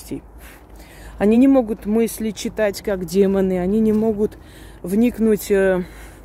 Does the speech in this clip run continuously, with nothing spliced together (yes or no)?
yes